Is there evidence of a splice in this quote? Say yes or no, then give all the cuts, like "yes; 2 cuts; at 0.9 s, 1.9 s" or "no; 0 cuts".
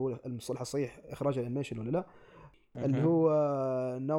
no; 0 cuts